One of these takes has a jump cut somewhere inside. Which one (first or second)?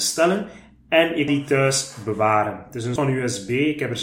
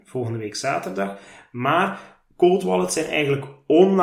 first